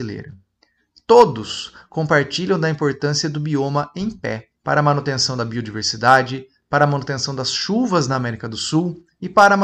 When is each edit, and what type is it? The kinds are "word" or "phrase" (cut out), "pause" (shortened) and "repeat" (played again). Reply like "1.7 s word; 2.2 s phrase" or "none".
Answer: 4.6 s pause